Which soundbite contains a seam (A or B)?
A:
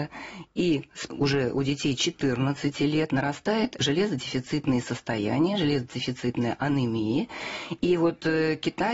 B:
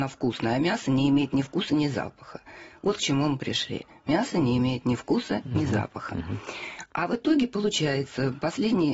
A